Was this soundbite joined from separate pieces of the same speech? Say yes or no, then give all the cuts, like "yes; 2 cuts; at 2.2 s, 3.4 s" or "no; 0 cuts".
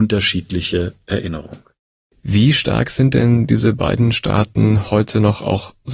no; 0 cuts